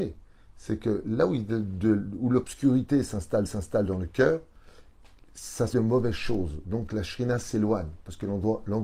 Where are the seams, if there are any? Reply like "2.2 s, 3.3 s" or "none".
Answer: 3.5 s, 5.7 s